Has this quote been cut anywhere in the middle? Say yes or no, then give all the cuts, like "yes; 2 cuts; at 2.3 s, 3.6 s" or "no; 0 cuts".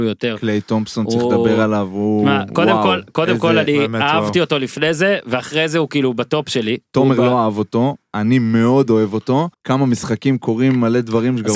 yes; 1 cut; at 9.5 s